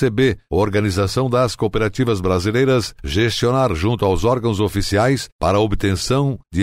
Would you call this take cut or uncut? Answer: uncut